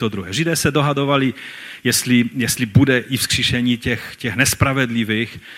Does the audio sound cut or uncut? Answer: uncut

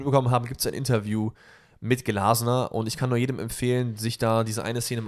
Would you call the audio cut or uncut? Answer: uncut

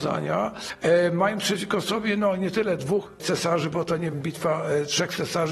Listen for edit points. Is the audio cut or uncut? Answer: cut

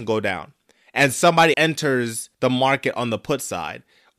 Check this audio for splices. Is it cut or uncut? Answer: cut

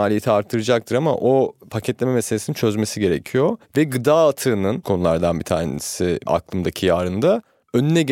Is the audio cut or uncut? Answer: cut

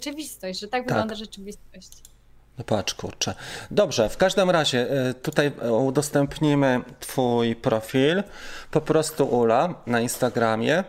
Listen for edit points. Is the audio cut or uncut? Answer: uncut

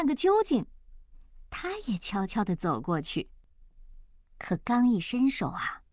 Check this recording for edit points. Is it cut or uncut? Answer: uncut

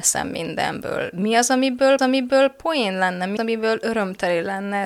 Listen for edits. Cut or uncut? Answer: cut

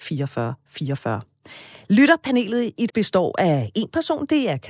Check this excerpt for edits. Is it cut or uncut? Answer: cut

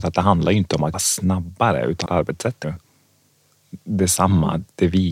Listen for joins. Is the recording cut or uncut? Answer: cut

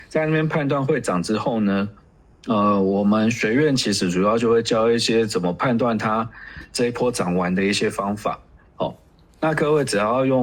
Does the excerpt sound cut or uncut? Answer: uncut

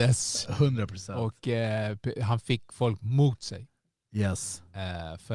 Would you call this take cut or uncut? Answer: uncut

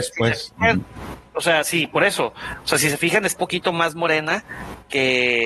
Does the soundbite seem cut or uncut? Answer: cut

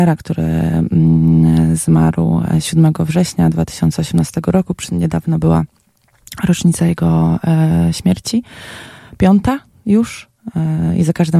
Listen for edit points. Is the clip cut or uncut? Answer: uncut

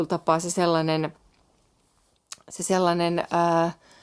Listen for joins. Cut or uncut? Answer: uncut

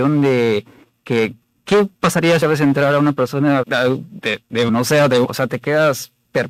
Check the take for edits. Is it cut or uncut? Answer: cut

